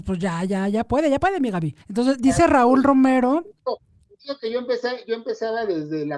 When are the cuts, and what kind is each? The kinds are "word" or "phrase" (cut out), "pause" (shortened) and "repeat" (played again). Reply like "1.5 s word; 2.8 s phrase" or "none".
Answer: 1.8 s pause